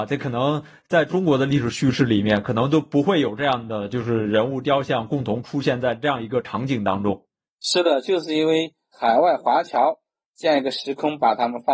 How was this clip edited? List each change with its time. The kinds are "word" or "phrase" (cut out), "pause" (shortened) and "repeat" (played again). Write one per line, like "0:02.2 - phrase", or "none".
none